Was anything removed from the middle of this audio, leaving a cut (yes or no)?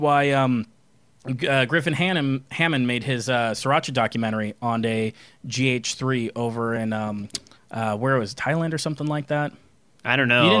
no